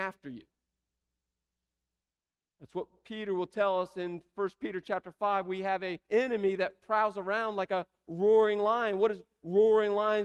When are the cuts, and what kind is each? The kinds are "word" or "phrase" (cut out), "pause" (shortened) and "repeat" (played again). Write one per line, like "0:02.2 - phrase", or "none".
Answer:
0:06.0 - pause